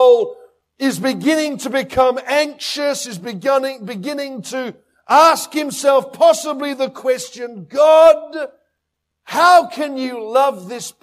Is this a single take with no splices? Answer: yes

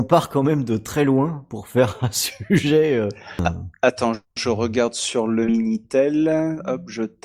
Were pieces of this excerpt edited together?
no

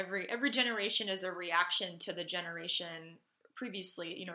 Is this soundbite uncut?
yes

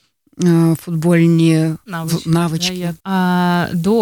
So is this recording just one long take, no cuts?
no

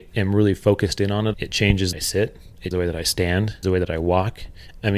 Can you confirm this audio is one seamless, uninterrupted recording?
no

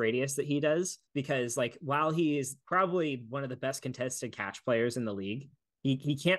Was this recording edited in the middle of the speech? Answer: yes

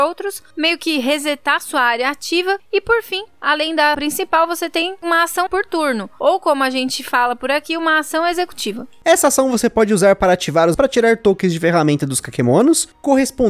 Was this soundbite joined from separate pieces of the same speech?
yes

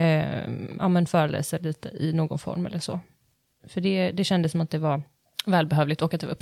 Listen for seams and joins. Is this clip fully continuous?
yes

